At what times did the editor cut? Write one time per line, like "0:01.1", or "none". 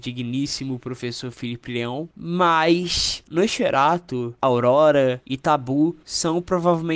none